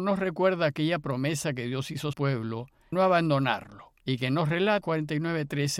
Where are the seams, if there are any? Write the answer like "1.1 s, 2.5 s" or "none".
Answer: 2.1 s, 2.9 s, 4.0 s, 4.8 s